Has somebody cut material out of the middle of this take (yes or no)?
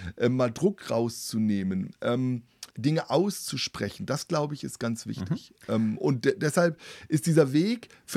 yes